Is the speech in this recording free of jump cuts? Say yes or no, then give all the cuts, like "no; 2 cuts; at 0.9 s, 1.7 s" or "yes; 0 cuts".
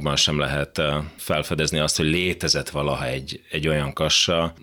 yes; 0 cuts